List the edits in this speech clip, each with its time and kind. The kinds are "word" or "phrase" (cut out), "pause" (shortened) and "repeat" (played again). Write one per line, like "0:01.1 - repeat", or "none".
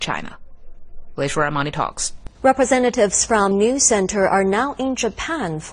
0:02.3 - pause
0:03.5 - word